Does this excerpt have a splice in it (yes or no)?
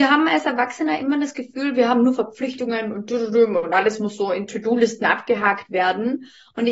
no